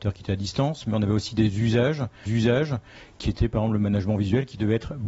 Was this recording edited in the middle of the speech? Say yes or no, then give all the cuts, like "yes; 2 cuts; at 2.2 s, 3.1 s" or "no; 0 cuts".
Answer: yes; 1 cut; at 2.3 s